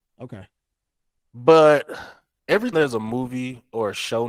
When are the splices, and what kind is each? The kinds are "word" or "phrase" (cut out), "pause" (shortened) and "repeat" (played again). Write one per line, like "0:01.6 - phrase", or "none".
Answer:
0:02.7 - word